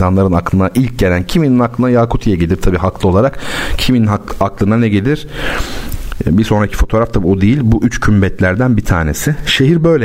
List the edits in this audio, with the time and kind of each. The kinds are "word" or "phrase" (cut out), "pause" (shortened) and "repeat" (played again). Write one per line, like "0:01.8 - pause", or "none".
none